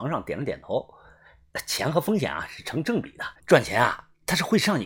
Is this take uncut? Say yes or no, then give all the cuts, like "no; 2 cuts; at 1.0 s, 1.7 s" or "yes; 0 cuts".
no; 1 cut; at 3.4 s